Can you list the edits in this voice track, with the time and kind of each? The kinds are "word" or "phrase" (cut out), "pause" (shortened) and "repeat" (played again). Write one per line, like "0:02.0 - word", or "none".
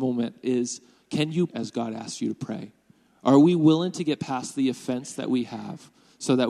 0:01.5 - word